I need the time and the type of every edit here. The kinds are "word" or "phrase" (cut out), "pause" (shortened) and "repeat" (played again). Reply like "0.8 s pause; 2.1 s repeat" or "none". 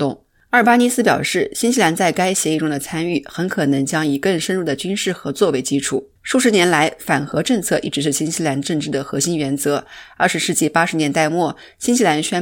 6.2 s pause